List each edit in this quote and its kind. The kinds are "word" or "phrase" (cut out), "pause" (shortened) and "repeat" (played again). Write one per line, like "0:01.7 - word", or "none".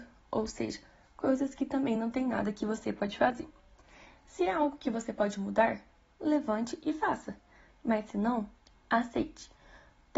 none